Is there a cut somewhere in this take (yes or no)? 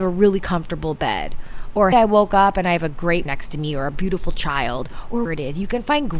yes